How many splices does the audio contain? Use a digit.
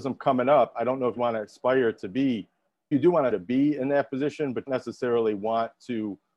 4